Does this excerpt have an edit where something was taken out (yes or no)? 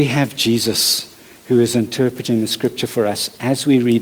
no